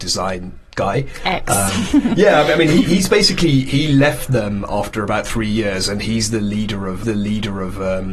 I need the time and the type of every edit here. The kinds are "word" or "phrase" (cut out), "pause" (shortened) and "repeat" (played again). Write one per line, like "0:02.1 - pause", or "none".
0:07.0 - repeat